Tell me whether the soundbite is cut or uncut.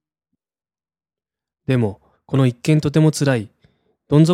cut